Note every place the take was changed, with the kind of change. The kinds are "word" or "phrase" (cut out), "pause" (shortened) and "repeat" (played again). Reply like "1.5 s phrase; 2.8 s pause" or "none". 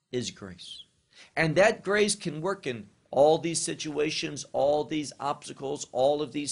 none